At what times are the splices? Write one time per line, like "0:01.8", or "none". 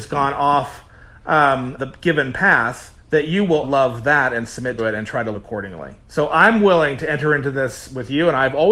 0:01.8
0:03.0
0:03.6
0:04.8
0:05.3
0:06.0